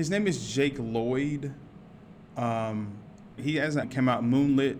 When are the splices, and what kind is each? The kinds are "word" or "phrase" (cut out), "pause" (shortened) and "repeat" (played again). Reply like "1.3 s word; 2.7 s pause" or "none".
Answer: 3.4 s word; 3.8 s word